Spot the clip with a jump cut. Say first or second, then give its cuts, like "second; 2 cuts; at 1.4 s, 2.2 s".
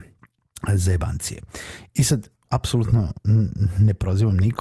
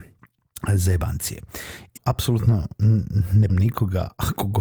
second; 2 cuts; at 2.0 s, 3.5 s